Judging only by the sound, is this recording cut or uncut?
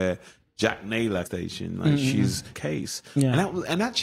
cut